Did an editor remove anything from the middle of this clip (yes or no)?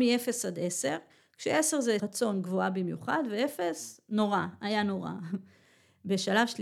yes